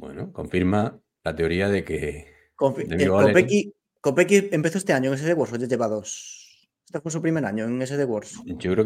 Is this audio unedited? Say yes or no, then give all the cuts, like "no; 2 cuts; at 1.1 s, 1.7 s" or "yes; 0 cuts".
yes; 0 cuts